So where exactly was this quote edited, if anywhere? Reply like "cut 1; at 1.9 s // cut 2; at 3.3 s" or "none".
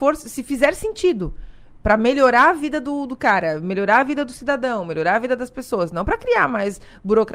none

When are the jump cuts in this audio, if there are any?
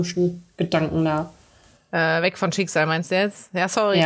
none

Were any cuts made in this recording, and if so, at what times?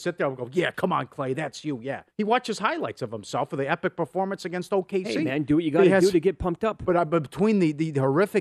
cut 1; at 2.1 s

